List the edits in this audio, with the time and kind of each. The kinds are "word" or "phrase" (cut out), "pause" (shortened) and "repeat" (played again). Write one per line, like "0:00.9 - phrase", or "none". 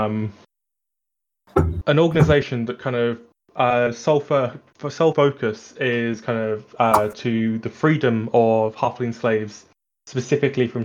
none